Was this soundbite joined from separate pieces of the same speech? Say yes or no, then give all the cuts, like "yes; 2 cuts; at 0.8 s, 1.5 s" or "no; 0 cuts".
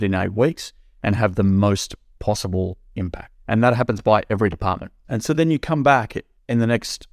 no; 0 cuts